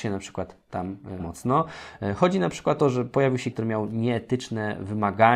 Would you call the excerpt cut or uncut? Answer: cut